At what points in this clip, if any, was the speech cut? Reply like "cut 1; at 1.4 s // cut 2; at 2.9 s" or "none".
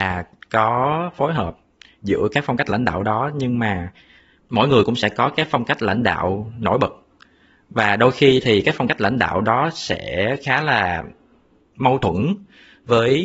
none